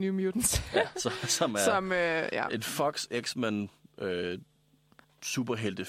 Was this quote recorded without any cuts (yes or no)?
yes